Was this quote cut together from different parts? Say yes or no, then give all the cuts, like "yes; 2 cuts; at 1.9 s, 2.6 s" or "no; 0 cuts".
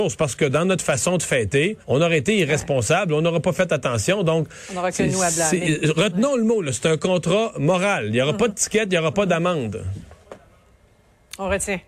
yes; 1 cut; at 1.8 s